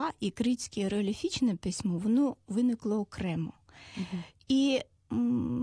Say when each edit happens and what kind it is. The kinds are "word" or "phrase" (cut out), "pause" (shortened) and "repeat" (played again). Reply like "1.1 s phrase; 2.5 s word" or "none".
none